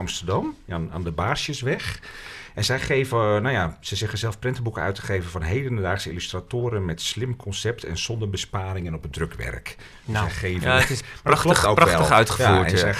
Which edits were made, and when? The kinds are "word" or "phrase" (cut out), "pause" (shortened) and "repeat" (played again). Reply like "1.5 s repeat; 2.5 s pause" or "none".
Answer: none